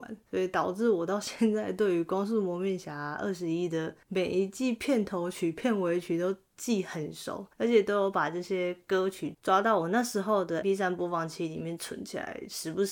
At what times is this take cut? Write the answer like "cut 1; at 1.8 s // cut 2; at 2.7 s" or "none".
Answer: cut 1; at 4.0 s // cut 2; at 7.5 s // cut 3; at 10.6 s